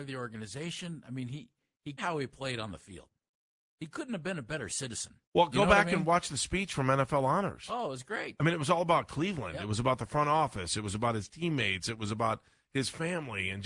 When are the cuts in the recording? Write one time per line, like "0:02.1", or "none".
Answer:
0:02.0
0:05.2